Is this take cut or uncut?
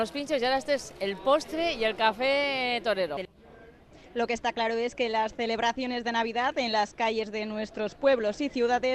uncut